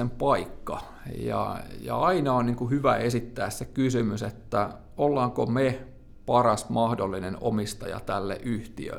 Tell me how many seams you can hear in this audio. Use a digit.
0